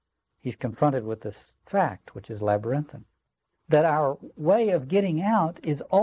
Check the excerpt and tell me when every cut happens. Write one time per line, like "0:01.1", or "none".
none